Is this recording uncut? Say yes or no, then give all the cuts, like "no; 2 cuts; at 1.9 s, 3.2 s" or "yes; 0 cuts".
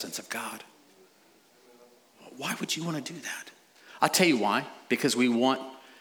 yes; 0 cuts